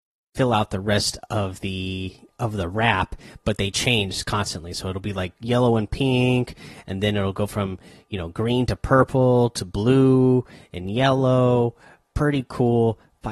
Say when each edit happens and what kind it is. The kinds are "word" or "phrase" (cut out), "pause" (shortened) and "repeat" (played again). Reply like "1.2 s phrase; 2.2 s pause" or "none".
none